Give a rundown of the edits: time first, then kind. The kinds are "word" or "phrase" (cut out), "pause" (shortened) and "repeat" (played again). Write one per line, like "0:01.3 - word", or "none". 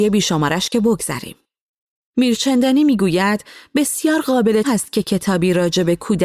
0:04.6 - word

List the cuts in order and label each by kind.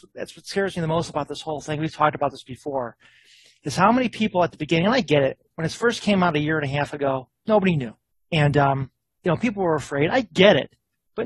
none

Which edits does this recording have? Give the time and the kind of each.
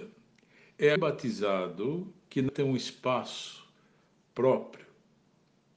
0:01.0 - word
0:02.5 - word

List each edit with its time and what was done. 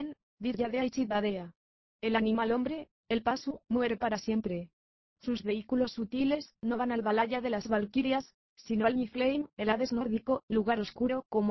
none

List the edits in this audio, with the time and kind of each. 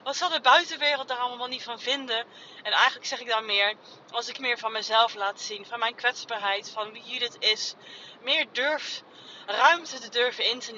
0:04.4 - word

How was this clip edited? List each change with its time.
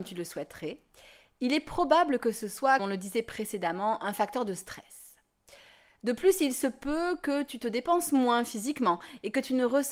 0:02.8 - word

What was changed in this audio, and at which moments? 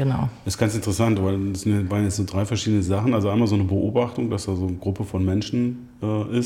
none

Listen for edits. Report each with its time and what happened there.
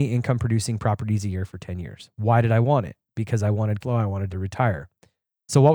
0:03.8 - word
0:04.3 - phrase

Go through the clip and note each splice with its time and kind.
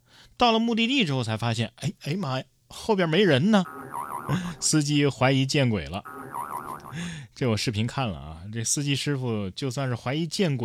0:02.6 - pause

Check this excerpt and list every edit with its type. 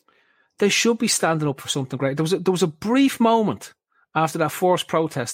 none

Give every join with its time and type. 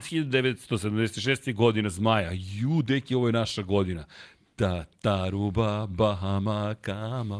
none

